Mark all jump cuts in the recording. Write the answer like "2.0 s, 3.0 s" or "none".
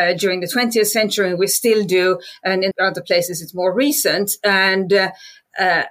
2.7 s

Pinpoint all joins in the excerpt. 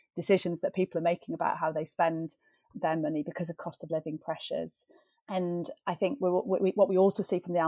none

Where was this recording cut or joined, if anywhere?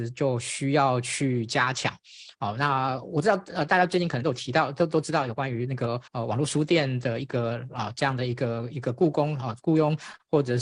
6.1 s

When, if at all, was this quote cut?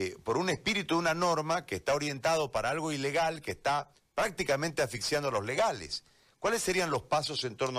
4.0 s

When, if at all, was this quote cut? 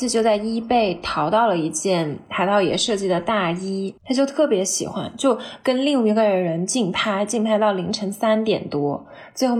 4.0 s

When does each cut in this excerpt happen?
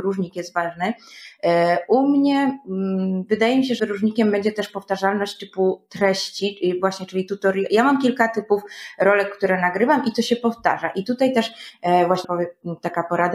3.8 s, 12.2 s

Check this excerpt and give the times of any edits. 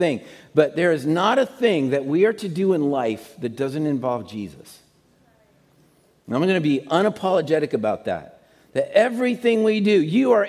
none

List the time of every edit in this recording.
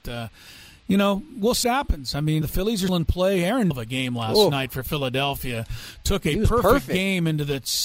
1.6 s, 2.4 s, 2.9 s, 3.7 s

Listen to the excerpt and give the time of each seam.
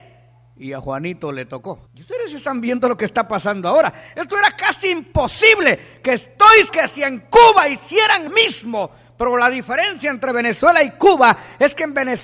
1.9 s, 6.7 s, 8.3 s

